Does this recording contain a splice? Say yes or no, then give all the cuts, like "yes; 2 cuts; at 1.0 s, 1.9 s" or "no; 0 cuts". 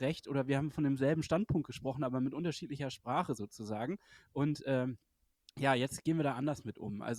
no; 0 cuts